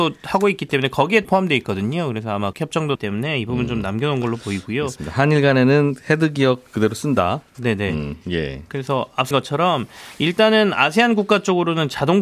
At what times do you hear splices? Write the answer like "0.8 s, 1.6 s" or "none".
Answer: 1.2 s, 2.5 s, 3.0 s, 9.3 s